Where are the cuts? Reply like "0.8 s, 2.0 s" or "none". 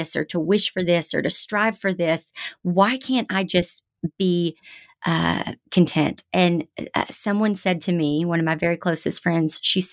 none